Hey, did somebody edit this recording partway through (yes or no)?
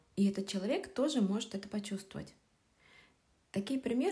no